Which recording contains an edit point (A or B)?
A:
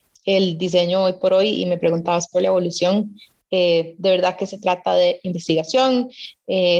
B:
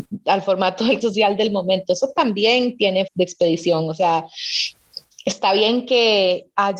B